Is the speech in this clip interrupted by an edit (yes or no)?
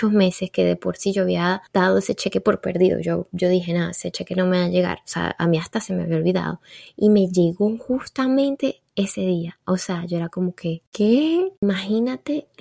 yes